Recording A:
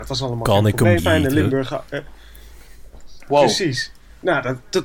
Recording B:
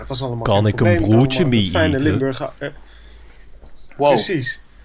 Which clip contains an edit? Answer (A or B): A